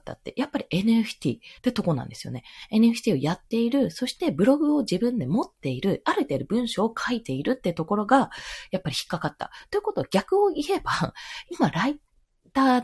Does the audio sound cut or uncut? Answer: cut